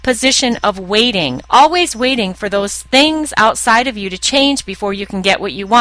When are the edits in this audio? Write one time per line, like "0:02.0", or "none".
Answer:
none